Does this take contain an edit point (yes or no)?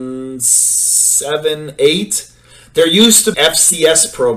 yes